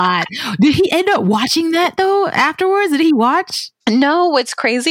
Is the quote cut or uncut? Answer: uncut